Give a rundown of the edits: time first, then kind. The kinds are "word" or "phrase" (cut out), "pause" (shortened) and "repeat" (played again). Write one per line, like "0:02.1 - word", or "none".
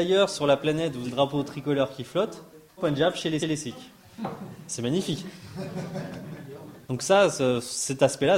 0:01.0 - word
0:02.8 - word
0:03.4 - repeat
0:06.8 - pause

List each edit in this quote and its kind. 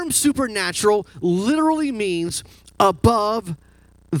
none

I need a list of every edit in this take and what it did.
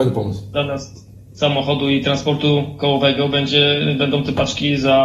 none

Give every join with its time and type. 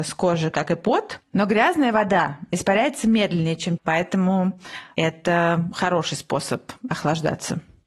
0:03.8 - word

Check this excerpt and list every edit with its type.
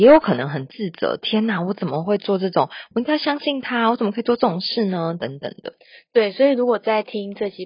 none

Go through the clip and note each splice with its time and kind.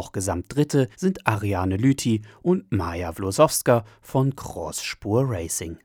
0:00.9 - pause

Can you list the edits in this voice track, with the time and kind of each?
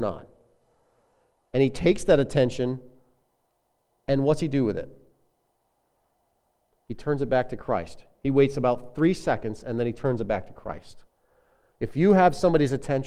none

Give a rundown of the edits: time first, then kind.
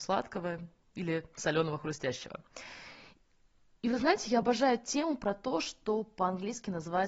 none

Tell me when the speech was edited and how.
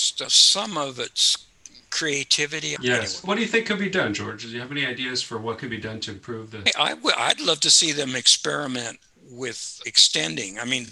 none

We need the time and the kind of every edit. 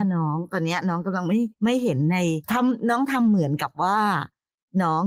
0:01.5 - pause
0:02.4 - pause

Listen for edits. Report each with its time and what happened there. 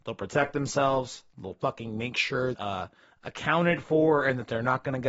0:02.5 - phrase

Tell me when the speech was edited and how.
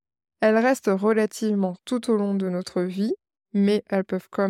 0:01.8 - word

